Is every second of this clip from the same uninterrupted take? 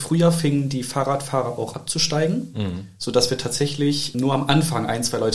no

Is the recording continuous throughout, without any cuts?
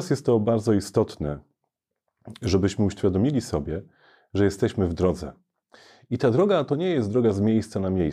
yes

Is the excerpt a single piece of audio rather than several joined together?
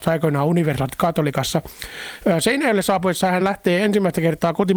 yes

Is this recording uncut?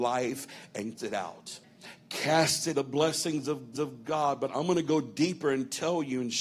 no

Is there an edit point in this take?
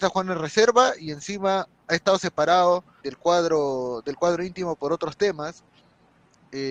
yes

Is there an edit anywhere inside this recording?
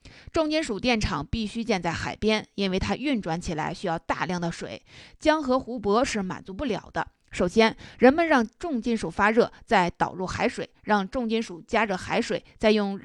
no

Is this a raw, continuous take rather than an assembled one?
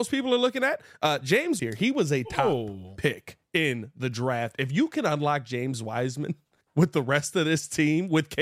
no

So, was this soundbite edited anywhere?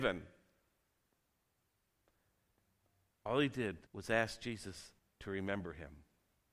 yes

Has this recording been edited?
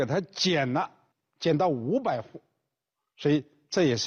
no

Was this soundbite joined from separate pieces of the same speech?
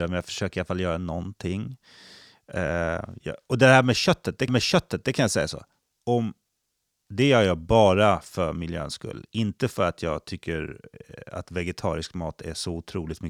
yes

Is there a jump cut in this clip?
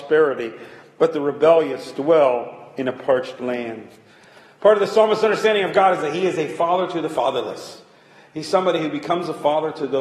no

